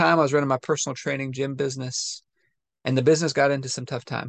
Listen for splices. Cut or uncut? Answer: uncut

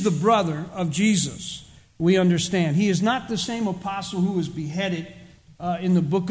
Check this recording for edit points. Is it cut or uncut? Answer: uncut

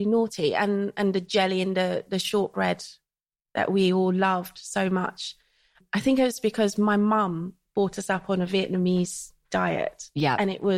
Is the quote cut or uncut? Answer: uncut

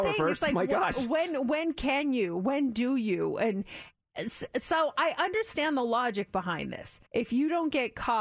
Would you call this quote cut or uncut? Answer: cut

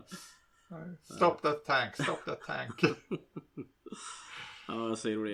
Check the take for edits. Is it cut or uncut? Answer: uncut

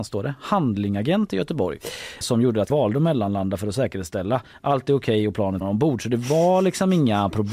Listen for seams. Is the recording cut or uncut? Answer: cut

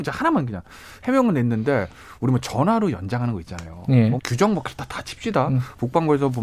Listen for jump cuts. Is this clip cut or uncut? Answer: cut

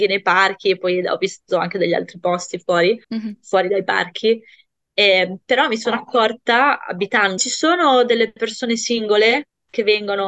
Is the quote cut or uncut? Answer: cut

